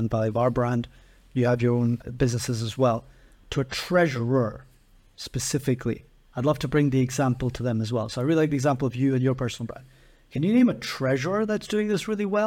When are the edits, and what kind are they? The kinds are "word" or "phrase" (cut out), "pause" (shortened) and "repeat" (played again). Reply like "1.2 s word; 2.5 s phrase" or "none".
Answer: none